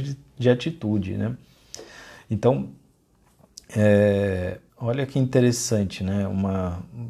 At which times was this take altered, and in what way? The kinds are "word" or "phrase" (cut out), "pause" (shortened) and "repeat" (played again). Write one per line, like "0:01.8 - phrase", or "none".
0:04.7 - pause